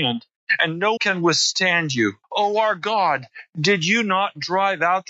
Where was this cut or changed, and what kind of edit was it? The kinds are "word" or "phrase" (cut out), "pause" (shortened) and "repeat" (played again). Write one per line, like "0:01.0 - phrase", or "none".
0:01.0 - word
0:02.2 - pause